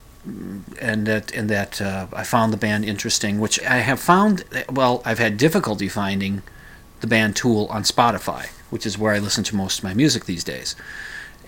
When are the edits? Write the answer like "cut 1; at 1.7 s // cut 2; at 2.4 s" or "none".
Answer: cut 1; at 3.6 s // cut 2; at 8.6 s